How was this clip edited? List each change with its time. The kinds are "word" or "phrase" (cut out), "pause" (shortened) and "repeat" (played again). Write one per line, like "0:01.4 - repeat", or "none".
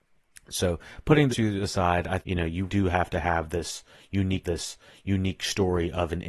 0:01.3 - word
0:02.2 - phrase
0:02.7 - word
0:04.4 - repeat

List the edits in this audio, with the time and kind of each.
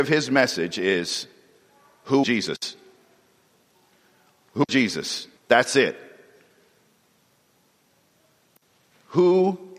0:02.2 - word
0:04.7 - word
0:05.4 - pause

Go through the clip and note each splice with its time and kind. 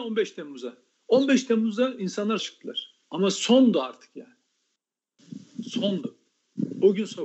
0:02.4 - word
0:03.0 - pause

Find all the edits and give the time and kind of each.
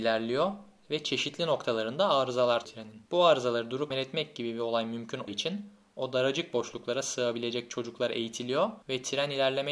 0:02.6 - word
0:03.1 - pause
0:03.9 - word
0:05.3 - word
0:08.8 - pause

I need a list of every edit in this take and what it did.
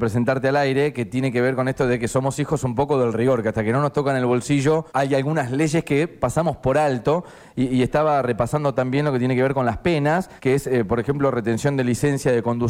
0:04.9 - pause
0:10.4 - pause

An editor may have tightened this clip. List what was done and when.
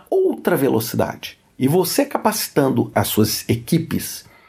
none

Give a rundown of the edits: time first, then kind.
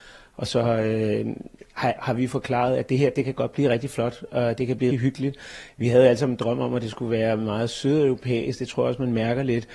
0:02.0 - word
0:04.9 - word

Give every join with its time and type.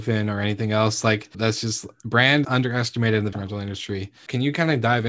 0:01.3 - word
0:02.4 - word
0:03.3 - word

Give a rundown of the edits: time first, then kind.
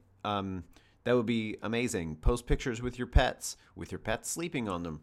none

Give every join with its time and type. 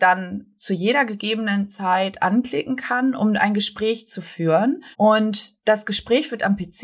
0:04.9 - pause

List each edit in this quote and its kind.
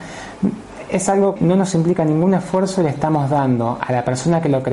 0:01.4 - word

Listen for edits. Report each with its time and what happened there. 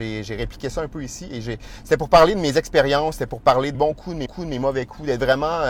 0:03.7 - word
0:04.3 - repeat

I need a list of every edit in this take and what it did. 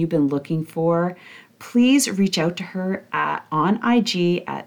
none

